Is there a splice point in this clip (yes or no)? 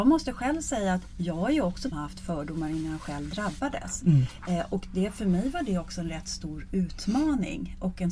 yes